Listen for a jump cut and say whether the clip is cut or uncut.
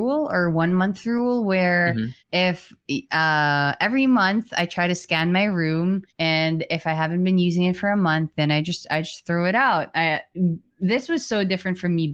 cut